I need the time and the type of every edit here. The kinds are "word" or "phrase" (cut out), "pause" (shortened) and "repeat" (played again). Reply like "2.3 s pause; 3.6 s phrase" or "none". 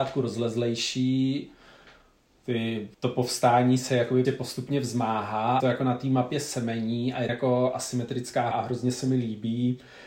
2.9 s pause; 4.2 s word; 5.6 s phrase; 7.3 s phrase; 8.5 s word

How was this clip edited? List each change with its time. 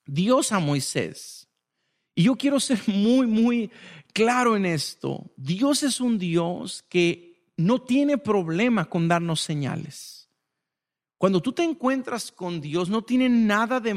none

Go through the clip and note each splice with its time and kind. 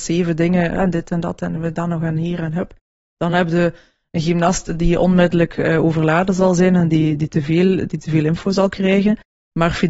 none

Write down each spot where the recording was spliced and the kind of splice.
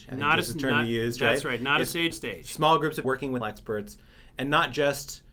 2.1 s word; 3.0 s word; 3.4 s word

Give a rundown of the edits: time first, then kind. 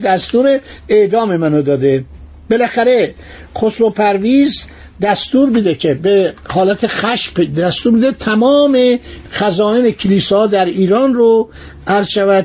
none

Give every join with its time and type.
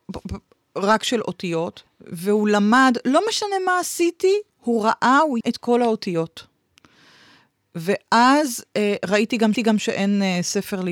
1.9 s pause; 4.5 s pause; 5.4 s word; 9.5 s repeat

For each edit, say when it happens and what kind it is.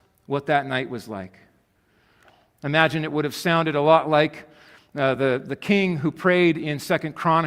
none

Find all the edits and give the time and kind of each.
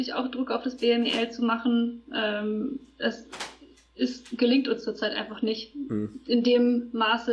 none

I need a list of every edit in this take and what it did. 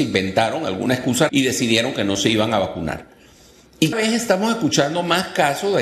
1.3 s word; 3.9 s word

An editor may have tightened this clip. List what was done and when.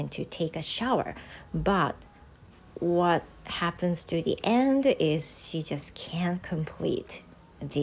none

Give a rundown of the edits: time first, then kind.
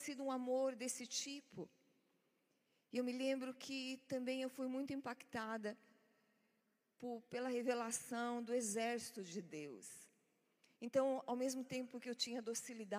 none

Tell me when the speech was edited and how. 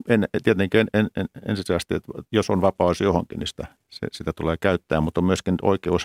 3.8 s pause

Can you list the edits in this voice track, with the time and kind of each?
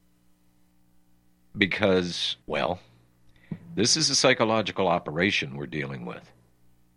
2.4 s pause

